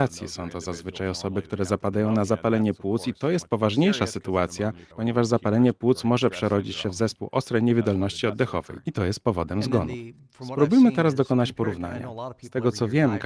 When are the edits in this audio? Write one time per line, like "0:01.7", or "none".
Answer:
0:04.9